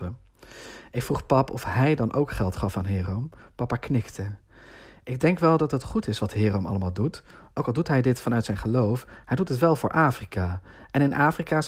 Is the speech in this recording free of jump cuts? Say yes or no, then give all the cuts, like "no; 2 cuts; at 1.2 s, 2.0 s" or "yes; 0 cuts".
yes; 0 cuts